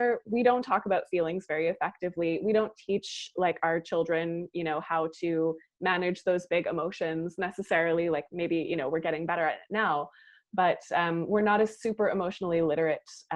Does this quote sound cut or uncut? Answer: uncut